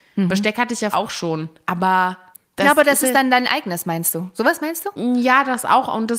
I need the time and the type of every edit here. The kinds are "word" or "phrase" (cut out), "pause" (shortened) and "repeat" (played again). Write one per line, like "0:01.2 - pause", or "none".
0:00.9 - word
0:02.3 - pause

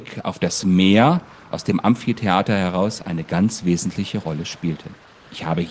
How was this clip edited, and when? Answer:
none

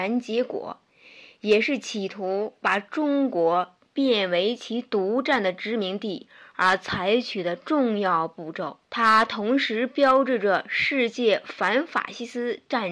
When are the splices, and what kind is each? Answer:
0:08.8 - pause

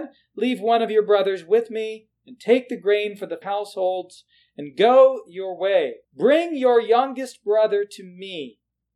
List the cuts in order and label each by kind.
0:03.4 - phrase
0:06.0 - pause

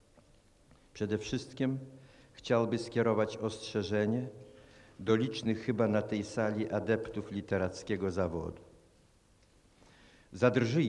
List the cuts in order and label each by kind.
none

